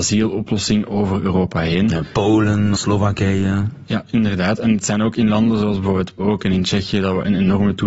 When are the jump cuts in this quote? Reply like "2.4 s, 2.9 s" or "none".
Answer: 2.8 s, 6.2 s